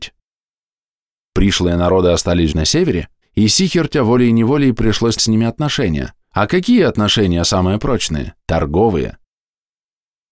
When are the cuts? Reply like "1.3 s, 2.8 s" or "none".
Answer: 2.5 s, 3.2 s, 5.2 s, 6.2 s, 8.4 s